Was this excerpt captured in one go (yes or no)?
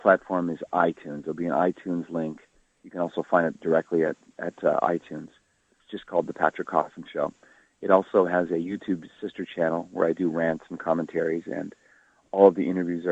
yes